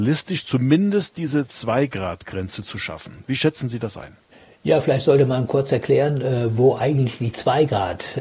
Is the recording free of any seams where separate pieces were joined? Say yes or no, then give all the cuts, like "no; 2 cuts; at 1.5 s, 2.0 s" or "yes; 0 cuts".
yes; 0 cuts